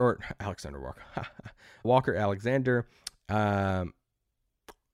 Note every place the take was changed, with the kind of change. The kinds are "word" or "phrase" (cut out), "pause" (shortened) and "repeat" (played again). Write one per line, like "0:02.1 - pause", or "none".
0:01.8 - word